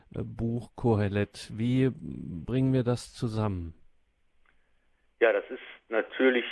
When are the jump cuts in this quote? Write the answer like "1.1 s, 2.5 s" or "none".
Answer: none